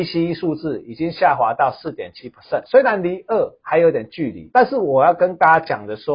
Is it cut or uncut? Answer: uncut